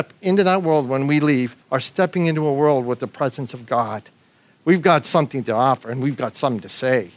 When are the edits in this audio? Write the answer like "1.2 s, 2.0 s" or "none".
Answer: 1.6 s